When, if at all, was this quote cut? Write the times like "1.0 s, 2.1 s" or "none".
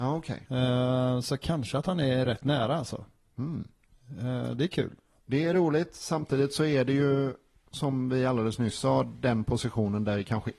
none